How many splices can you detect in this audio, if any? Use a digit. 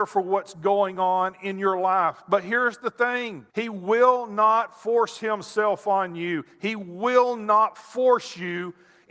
1